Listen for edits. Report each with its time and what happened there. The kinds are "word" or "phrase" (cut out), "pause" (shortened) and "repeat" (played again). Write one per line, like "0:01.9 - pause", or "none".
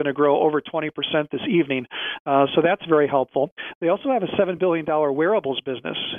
none